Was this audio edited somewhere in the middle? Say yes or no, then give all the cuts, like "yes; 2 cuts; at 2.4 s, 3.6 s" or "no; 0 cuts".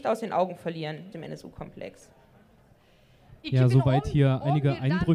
yes; 1 cut; at 1.1 s